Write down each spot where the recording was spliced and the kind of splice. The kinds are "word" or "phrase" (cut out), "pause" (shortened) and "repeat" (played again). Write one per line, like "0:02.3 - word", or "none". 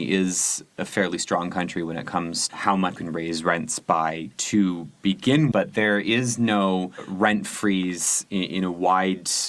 0:02.5 - word
0:03.0 - word
0:05.5 - word